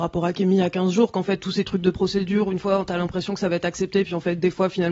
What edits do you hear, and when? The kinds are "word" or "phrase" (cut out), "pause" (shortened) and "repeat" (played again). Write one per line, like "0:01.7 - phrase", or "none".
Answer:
none